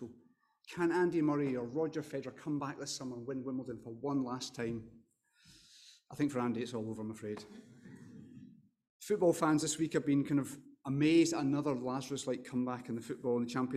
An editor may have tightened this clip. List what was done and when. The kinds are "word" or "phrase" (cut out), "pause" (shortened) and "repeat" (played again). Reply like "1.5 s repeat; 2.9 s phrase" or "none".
none